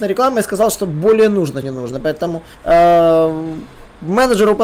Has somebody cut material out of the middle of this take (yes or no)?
yes